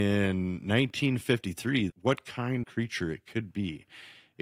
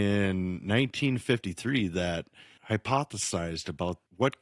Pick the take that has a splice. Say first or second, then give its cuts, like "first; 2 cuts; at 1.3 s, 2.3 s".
first; 2 cuts; at 1.9 s, 2.6 s